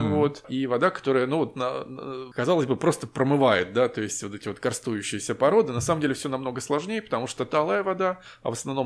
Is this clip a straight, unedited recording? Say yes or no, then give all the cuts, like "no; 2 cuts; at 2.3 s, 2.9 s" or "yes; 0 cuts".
yes; 0 cuts